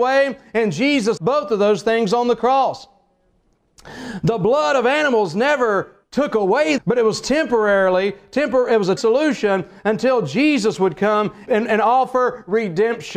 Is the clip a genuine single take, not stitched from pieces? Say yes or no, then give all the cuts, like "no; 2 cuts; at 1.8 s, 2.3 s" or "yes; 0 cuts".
no; 5 cuts; at 1.2 s, 6.0 s, 6.8 s, 9.0 s, 11.5 s